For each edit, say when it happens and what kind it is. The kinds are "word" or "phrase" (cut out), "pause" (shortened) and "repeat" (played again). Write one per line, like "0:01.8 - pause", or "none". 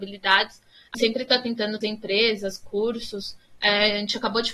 0:00.9 - word
0:01.8 - word